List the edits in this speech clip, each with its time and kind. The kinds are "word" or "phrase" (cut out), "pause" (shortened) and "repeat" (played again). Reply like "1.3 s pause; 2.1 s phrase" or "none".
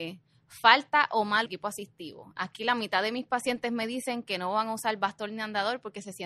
1.5 s phrase